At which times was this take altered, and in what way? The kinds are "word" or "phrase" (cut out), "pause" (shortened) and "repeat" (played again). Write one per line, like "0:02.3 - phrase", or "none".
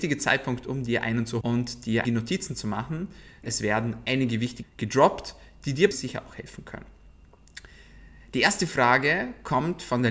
0:01.4 - word
0:02.0 - word
0:03.4 - word
0:04.6 - word
0:05.9 - word